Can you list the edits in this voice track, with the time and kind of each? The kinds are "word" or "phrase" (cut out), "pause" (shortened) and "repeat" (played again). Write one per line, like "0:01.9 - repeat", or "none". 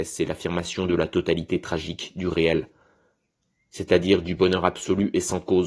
none